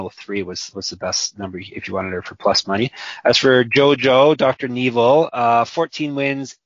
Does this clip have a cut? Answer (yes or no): no